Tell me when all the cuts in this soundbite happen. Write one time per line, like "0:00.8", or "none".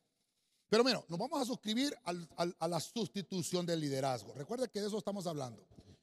none